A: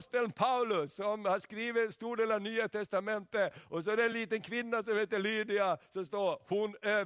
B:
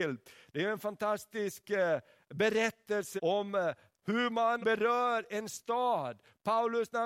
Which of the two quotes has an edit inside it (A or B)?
B